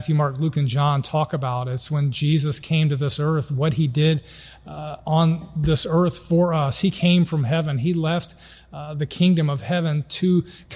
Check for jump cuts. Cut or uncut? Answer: uncut